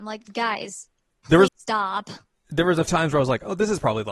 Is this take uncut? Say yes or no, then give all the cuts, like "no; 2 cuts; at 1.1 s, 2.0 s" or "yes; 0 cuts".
no; 2 cuts; at 1.5 s, 2.9 s